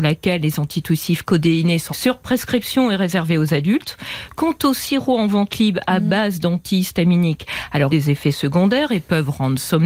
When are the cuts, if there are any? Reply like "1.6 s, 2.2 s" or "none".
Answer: 1.9 s, 7.9 s